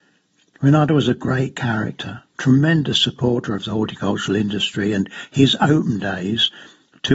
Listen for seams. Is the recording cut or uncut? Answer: cut